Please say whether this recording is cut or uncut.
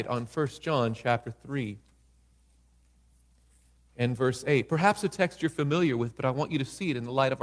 uncut